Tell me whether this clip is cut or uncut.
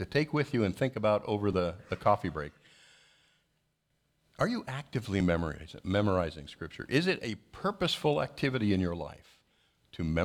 uncut